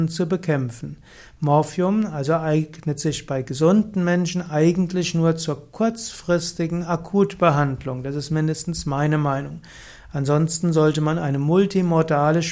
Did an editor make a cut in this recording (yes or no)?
no